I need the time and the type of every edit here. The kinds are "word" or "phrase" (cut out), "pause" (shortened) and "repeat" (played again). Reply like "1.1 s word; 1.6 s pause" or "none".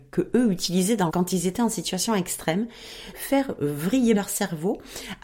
1.1 s word; 3.1 s word; 4.1 s word